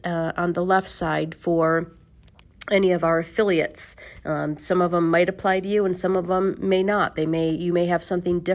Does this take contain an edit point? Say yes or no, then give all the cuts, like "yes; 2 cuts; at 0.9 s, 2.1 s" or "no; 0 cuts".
no; 0 cuts